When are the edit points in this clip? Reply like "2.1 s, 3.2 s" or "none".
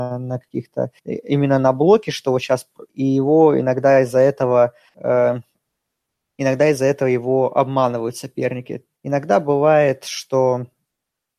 1.0 s, 2.9 s, 4.9 s, 8.9 s